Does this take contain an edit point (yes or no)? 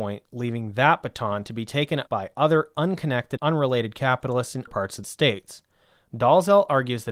yes